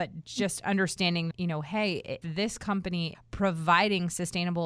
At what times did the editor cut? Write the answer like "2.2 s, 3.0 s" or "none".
1.3 s, 2.2 s, 3.1 s